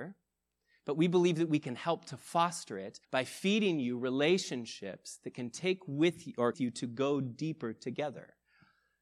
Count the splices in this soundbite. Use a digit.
2